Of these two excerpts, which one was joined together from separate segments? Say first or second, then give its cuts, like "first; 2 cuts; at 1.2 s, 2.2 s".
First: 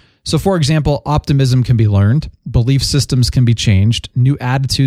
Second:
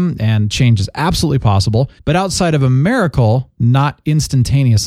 second; 1 cut; at 2.0 s